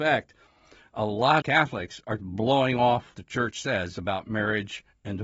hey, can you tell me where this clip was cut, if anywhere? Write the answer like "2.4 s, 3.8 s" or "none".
1.4 s, 2.2 s, 3.1 s